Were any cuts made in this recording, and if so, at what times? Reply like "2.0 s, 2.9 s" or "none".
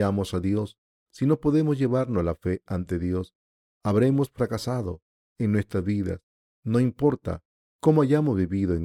none